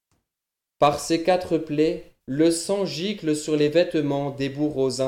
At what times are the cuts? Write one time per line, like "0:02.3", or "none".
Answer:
0:02.2